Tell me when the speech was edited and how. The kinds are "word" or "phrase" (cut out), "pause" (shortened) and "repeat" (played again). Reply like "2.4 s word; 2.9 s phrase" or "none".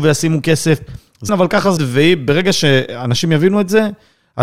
1.3 s word; 1.8 s word